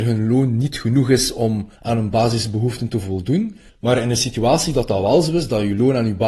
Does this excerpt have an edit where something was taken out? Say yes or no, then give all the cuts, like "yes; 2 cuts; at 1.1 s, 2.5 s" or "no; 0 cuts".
yes; 2 cuts; at 1.8 s, 3.7 s